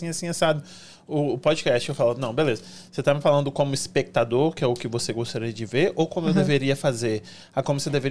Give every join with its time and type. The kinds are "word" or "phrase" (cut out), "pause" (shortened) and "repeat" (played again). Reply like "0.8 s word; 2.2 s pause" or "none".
none